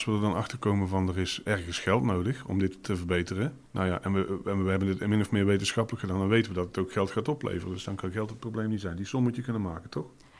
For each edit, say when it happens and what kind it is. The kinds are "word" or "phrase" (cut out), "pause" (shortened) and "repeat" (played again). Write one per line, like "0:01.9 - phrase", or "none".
0:01.5 - word
0:03.6 - pause